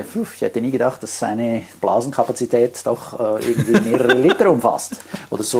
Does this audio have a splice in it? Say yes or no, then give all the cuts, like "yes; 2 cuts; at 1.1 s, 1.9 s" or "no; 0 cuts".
no; 0 cuts